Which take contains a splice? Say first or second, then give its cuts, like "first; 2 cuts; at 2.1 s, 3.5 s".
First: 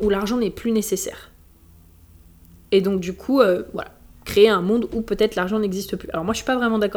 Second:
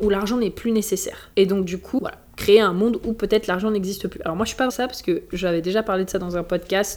second; 4 cuts; at 1.3 s, 2.0 s, 2.3 s, 4.7 s